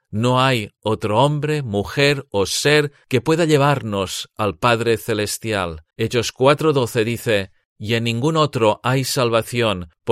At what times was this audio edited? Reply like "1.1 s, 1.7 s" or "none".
5.9 s